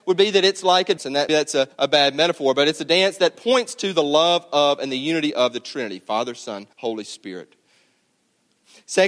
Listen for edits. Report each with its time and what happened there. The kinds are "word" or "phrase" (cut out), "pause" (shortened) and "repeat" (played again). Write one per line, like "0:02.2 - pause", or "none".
0:01.0 - word
0:01.3 - word
0:01.7 - pause
0:06.7 - pause